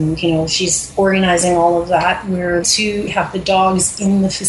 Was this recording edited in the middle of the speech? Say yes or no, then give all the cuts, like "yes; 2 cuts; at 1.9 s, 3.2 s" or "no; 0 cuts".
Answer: yes; 2 cuts; at 2.6 s, 3.1 s